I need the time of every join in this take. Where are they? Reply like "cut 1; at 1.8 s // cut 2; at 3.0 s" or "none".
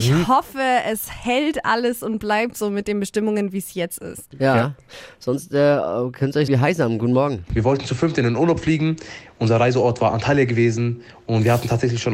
cut 1; at 6.5 s